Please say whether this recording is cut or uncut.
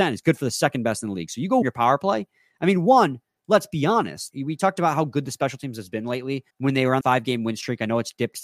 cut